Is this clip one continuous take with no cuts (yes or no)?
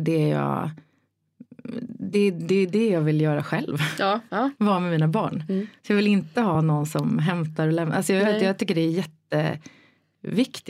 yes